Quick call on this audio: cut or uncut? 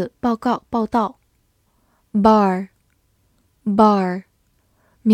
uncut